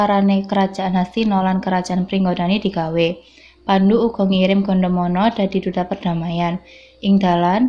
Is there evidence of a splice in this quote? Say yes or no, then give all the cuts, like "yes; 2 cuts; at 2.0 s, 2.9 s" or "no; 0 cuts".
no; 0 cuts